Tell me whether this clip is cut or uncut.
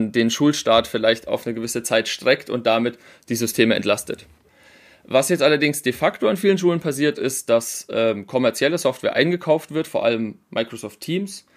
uncut